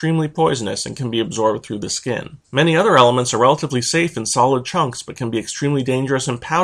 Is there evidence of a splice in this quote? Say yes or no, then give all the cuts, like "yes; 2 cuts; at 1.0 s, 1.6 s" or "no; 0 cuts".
yes; 1 cut; at 2.4 s